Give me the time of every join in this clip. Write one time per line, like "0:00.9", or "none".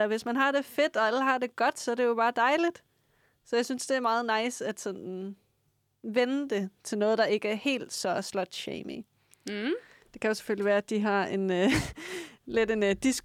none